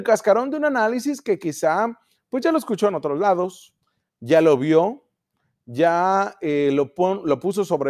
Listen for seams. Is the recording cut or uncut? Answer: uncut